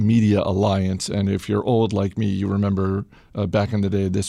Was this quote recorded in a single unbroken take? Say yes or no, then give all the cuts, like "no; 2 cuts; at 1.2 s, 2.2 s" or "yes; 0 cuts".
yes; 0 cuts